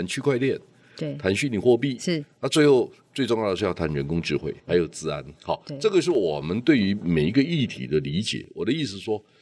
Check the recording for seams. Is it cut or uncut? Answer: cut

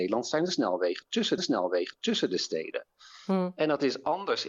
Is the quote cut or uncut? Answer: cut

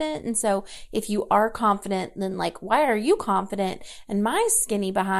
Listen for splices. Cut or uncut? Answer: uncut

